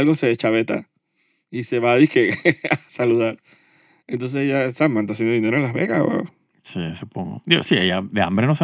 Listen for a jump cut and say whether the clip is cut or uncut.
uncut